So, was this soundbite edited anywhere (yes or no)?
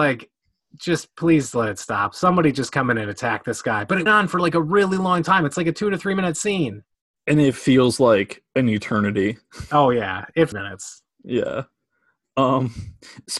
yes